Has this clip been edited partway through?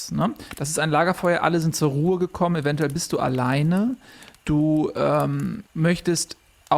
yes; 1 cut; at 5.7 s

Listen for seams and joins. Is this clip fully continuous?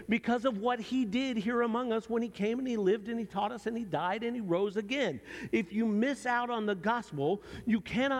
yes; 0 cuts

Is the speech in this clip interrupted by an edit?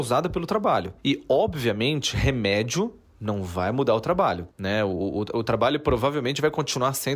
yes; 1 cut; at 4.5 s

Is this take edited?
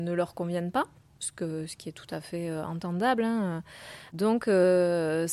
no; 0 cuts

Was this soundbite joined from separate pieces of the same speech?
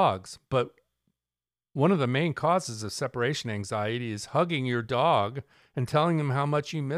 no; 0 cuts

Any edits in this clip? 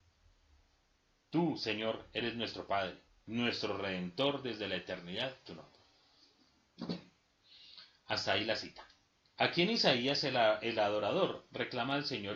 yes; 2 cuts; at 3.1 s, 5.5 s

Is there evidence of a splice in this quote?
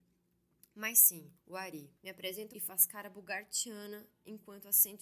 yes; 3 cuts; at 1.4 s, 2.0 s, 2.5 s

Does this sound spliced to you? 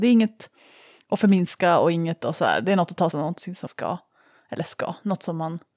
yes; 2 cuts; at 3.1 s, 3.7 s

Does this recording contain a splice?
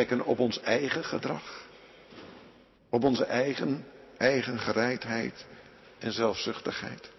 yes; 1 cut; at 2.8 s

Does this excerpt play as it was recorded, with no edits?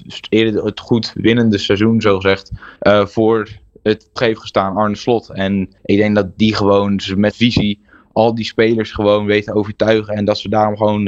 no; 4 cuts; at 2.8 s, 4.2 s, 5.8 s, 7.3 s

